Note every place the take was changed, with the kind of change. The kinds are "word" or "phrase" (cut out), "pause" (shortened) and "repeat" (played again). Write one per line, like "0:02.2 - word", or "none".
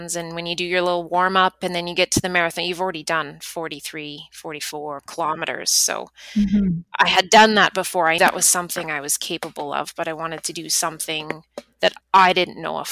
0:06.9 - pause
0:08.2 - word
0:12.0 - pause